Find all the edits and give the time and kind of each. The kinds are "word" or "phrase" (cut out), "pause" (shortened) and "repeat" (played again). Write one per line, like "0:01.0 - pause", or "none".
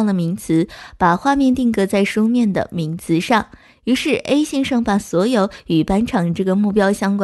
none